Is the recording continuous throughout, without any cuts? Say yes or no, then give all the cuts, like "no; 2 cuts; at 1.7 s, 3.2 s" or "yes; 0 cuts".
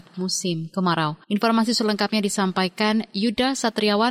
no; 1 cut; at 1.2 s